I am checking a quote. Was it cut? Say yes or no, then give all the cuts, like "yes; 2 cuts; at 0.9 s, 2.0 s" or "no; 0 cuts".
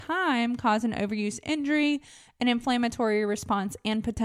no; 0 cuts